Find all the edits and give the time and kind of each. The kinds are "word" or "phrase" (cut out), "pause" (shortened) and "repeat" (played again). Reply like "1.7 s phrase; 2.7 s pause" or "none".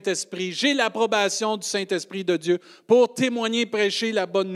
none